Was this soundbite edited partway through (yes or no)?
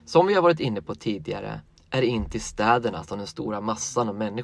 no